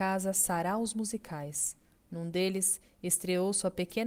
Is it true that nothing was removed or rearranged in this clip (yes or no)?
yes